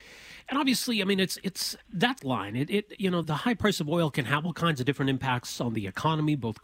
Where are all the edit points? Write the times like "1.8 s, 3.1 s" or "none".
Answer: 2.2 s, 3.2 s